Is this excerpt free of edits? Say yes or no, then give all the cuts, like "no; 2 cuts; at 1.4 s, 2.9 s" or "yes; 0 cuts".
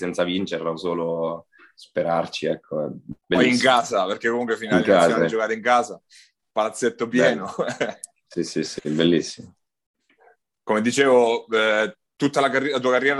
no; 1 cut; at 3.2 s